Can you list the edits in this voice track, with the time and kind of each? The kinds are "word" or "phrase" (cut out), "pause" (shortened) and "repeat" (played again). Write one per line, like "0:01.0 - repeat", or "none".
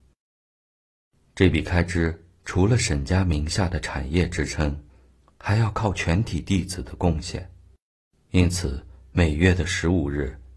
none